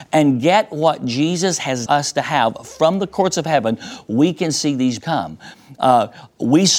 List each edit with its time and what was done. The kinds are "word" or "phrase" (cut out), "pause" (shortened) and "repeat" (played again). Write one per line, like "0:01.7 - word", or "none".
0:01.9 - phrase
0:05.0 - word